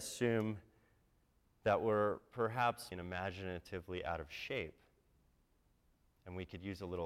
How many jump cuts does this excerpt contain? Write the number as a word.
one